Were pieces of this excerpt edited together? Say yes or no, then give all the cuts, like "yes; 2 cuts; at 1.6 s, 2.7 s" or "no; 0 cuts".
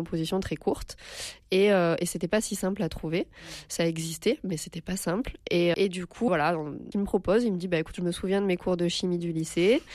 yes; 3 cuts; at 5.7 s, 6.3 s, 6.9 s